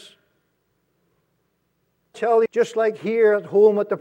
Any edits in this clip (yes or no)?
yes